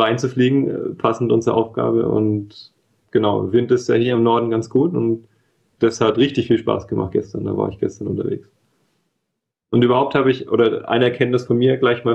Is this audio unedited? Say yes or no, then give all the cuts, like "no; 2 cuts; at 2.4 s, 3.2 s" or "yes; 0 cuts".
yes; 0 cuts